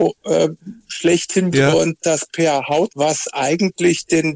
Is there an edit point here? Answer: yes; 2 cuts; at 1.5 s, 2.9 s

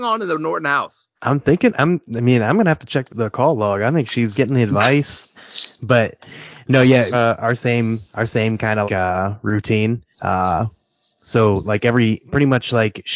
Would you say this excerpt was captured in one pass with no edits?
no; 6 cuts; at 1.1 s, 3.1 s, 4.3 s, 7.1 s, 8.9 s, 10.1 s

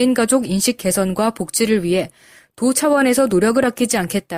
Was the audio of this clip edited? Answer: no; 0 cuts

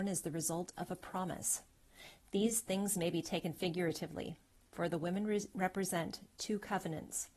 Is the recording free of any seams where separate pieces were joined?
yes; 0 cuts

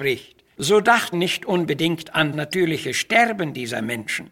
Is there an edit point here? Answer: yes; 2 cuts; at 1.1 s, 2.3 s

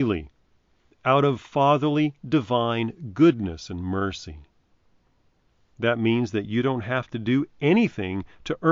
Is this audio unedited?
yes; 0 cuts

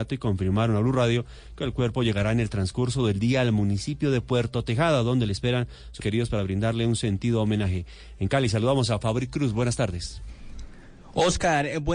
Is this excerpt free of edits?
no; 1 cut; at 6.0 s

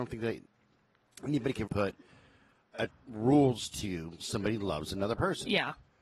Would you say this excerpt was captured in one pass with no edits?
no; 3 cuts; at 1.7 s, 2.9 s, 4.2 s

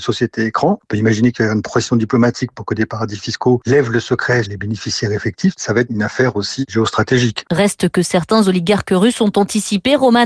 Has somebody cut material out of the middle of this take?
yes; 1 cut; at 4.4 s

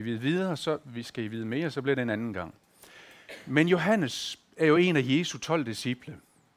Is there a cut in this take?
no; 0 cuts

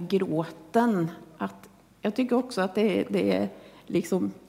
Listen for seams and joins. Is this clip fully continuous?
yes; 0 cuts

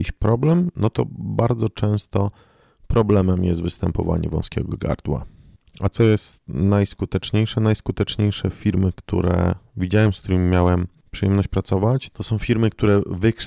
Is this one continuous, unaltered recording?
yes; 0 cuts

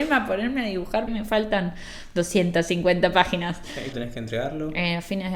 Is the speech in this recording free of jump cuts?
no; 2 cuts; at 1.1 s, 3.9 s

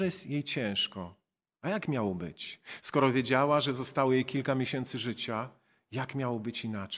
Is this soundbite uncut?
yes; 0 cuts

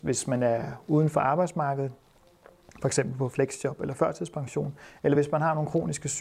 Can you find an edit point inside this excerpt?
no; 0 cuts

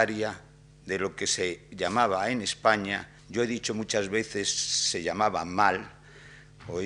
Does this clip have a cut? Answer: yes; 1 cut; at 3.2 s

